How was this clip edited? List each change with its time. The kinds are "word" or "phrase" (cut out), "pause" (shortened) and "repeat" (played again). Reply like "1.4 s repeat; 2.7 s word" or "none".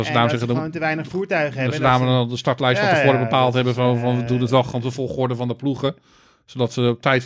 none